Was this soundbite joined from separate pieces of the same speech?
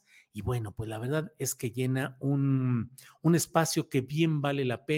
no; 0 cuts

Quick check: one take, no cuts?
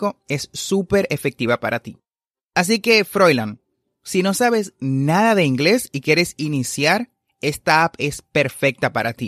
yes; 0 cuts

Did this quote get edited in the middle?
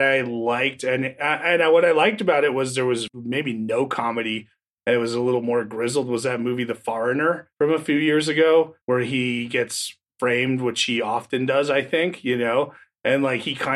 yes; 3 cuts; at 3.1 s, 7.5 s, 8.8 s

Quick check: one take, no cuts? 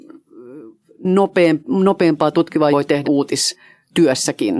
no; 2 cuts; at 2.7 s, 3.0 s

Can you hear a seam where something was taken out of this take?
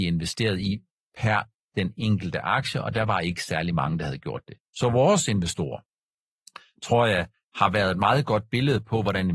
no; 0 cuts

